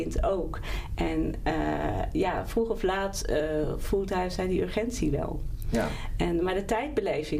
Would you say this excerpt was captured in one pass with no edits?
yes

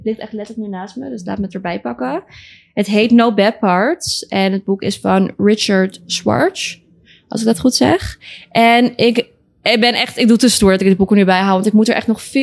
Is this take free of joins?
yes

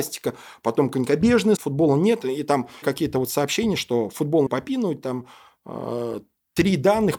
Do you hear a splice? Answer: yes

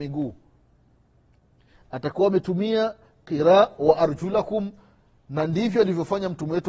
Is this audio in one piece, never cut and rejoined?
yes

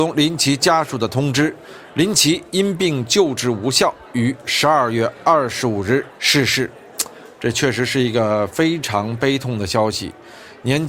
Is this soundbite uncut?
yes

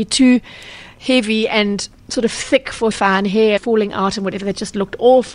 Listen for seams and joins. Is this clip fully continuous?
no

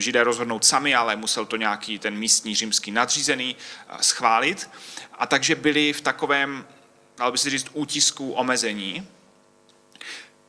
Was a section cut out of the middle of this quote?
no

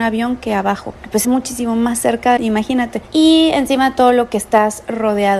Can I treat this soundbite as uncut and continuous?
no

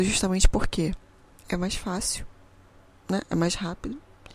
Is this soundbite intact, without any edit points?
yes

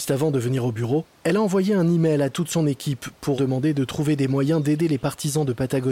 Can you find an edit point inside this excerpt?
yes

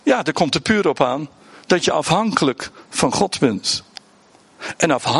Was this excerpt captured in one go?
yes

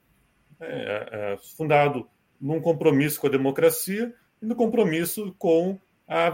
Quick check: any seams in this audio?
no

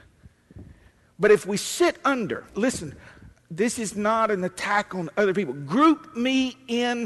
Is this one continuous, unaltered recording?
no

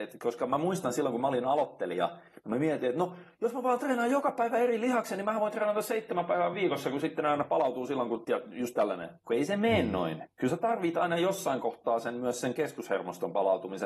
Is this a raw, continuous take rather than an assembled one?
yes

